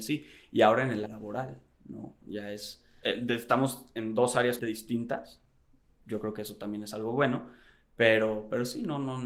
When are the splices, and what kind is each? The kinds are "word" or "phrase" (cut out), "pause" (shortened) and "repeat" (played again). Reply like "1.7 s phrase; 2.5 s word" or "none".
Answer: 1.1 s word; 3.0 s word; 4.6 s word